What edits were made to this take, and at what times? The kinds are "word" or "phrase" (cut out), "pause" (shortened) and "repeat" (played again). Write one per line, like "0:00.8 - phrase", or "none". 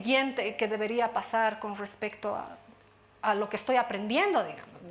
none